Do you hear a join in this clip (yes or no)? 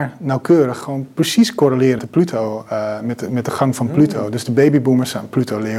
yes